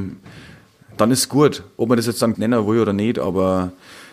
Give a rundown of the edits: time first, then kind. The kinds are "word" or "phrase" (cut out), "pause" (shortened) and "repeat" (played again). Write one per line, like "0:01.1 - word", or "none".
0:02.3 - word